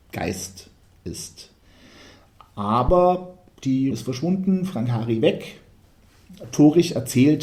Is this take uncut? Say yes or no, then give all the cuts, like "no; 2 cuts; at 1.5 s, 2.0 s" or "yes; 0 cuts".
no; 1 cut; at 3.9 s